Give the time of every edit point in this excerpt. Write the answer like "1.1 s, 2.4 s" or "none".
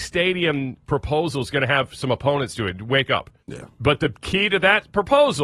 3.4 s

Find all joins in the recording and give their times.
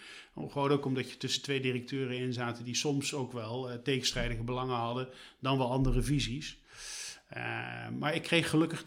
none

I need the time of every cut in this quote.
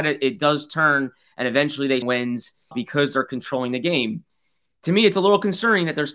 2.0 s, 2.7 s

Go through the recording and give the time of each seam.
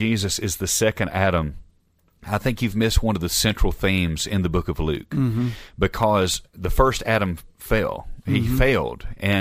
6.5 s

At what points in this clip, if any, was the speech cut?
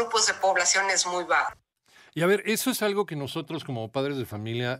none

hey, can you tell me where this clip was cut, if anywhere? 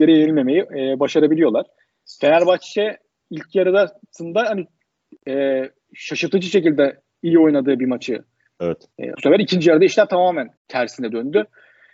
9.1 s, 10.6 s

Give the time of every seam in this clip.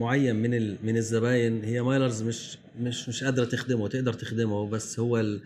none

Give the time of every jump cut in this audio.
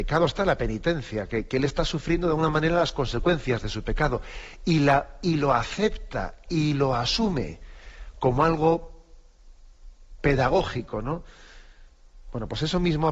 none

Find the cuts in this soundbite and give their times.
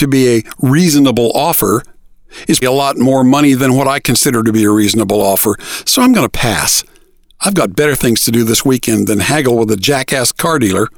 2.6 s

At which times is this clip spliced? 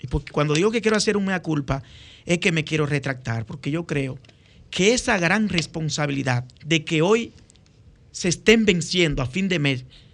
6.6 s

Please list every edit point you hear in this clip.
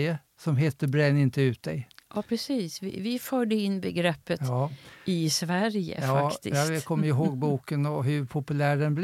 none

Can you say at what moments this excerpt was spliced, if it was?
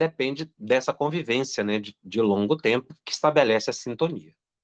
none

